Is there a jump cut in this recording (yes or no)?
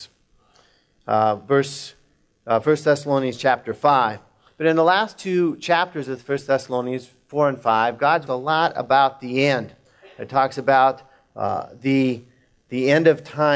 yes